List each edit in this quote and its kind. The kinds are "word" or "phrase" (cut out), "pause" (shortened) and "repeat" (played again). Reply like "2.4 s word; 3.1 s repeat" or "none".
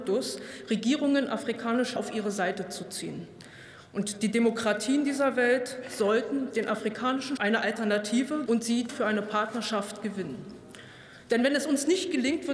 2.0 s word; 7.4 s word; 8.5 s word; 8.9 s word